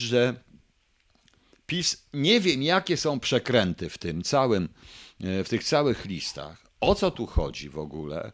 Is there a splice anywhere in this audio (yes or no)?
no